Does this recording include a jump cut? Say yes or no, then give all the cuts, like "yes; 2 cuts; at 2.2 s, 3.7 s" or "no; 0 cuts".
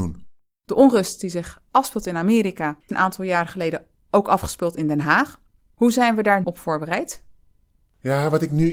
yes; 2 cuts; at 2.9 s, 6.4 s